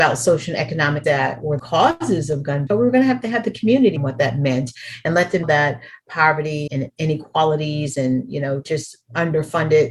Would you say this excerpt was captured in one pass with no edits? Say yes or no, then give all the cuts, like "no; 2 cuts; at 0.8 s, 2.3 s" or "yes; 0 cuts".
no; 6 cuts; at 1.0 s, 1.6 s, 2.7 s, 4.0 s, 5.4 s, 6.7 s